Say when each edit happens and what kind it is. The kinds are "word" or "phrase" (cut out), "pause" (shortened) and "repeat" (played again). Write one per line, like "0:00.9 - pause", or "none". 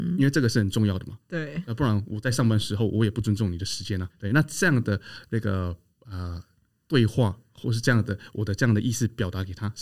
0:04.1 - word